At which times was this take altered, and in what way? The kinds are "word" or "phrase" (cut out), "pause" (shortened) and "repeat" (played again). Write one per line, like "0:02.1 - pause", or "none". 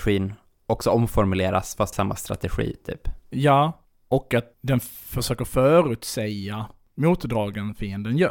0:01.9 - phrase
0:04.5 - pause